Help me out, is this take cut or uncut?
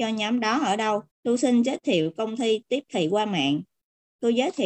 cut